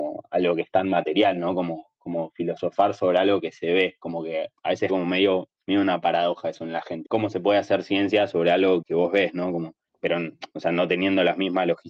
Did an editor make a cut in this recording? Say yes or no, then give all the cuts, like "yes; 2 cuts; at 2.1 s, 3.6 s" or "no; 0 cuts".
yes; 6 cuts; at 4.6 s, 4.9 s, 5.5 s, 7.0 s, 8.8 s, 9.9 s